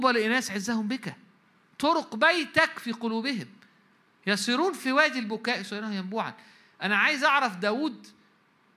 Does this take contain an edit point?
no; 0 cuts

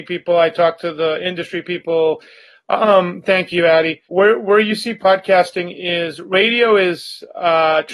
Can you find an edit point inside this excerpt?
yes; 1 cut; at 4.0 s

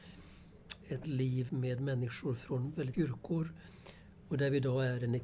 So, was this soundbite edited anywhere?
yes; 3 cuts; at 1.0 s, 1.5 s, 2.9 s

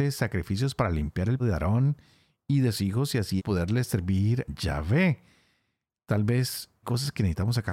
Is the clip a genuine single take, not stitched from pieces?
no; 5 cuts; at 1.4 s, 2.7 s, 3.4 s, 4.5 s, 6.8 s

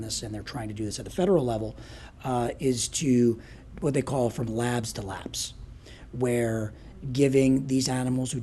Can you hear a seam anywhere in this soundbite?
no; 0 cuts

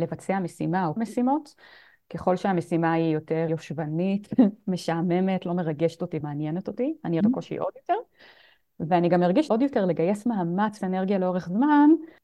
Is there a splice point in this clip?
yes; 6 cuts; at 1.0 s, 3.5 s, 6.2 s, 7.2 s, 9.5 s, 10.8 s

